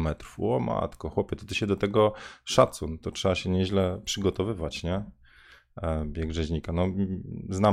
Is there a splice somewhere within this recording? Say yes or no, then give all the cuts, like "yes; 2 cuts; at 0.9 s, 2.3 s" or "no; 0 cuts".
no; 0 cuts